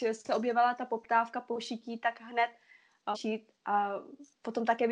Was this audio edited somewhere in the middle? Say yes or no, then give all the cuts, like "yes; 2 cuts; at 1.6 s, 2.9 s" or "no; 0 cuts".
yes; 2 cuts; at 3.1 s, 3.5 s